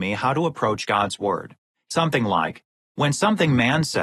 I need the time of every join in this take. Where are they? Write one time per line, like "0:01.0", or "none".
0:01.9